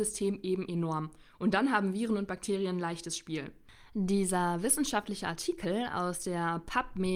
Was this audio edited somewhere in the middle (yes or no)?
no